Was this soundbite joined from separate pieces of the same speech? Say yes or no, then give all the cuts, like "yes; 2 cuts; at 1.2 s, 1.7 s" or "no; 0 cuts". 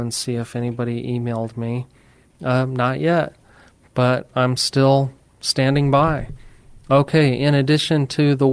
no; 0 cuts